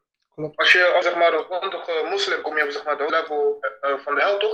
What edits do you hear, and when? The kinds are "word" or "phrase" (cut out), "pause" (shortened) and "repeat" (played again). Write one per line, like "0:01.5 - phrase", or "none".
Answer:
0:01.0 - word
0:02.4 - word
0:03.1 - word